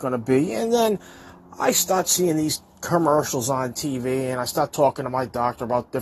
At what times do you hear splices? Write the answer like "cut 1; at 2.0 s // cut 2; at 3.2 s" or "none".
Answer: none